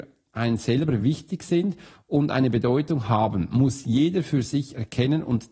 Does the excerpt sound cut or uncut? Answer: uncut